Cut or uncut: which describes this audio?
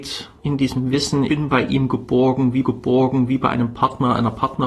cut